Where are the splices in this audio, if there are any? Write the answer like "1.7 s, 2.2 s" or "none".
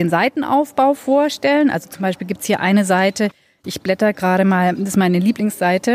none